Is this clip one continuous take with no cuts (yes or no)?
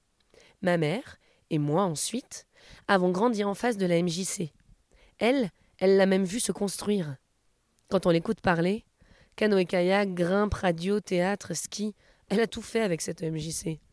yes